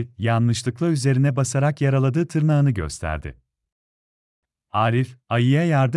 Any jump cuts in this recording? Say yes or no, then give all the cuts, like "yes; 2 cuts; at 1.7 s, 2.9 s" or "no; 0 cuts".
no; 0 cuts